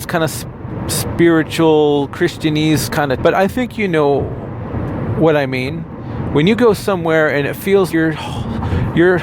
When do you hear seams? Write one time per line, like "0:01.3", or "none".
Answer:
0:03.2
0:07.9